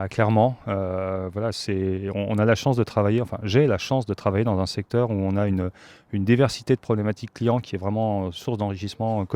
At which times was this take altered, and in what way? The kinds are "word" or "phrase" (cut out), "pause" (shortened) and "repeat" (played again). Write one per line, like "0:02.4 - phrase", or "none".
none